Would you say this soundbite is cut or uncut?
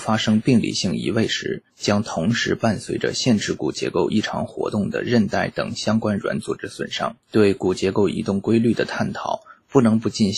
cut